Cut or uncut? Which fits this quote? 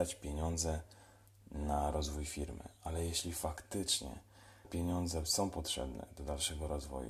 cut